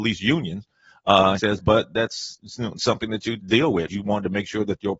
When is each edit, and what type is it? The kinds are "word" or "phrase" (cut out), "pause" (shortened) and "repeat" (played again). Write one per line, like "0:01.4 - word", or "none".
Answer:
0:01.4 - word
0:03.4 - word
0:03.9 - word